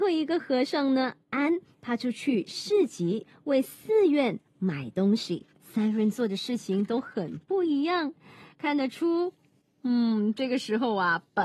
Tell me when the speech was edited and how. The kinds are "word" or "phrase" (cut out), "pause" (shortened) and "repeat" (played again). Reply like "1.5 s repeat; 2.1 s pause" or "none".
5.5 s pause